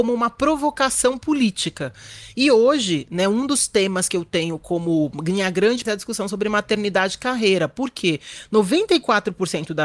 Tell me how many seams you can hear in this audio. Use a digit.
1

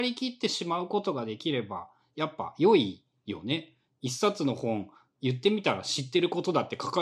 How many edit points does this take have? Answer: 0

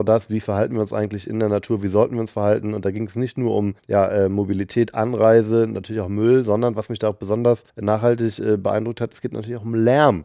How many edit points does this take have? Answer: 2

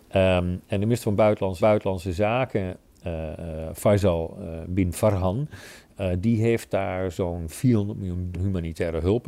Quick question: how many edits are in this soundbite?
2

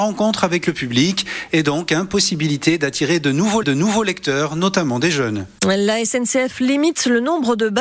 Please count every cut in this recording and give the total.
1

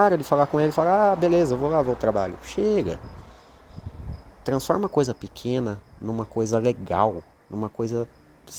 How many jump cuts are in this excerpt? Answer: 2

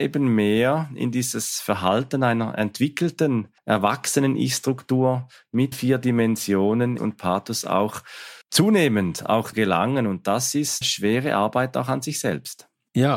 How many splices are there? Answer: 6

